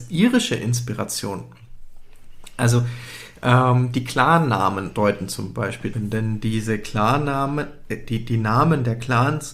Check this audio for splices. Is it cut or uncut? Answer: cut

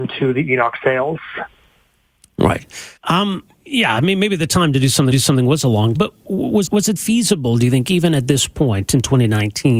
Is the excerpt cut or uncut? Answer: cut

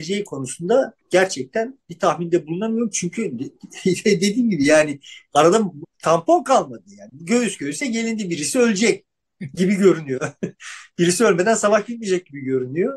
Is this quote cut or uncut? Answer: cut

